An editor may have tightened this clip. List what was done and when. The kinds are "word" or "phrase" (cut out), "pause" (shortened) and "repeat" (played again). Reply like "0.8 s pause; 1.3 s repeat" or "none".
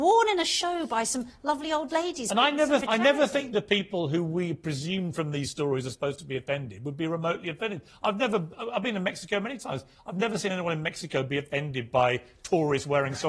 2.8 s word